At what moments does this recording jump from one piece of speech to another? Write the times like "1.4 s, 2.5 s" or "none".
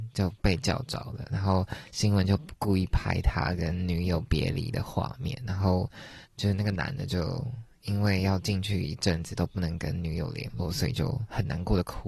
6.2 s